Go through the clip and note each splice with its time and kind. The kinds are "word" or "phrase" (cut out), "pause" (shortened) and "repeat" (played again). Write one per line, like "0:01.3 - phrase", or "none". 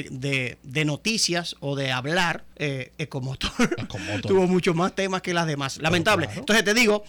0:02.5 - pause